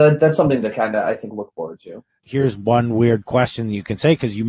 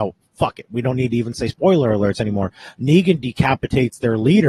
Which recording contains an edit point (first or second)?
first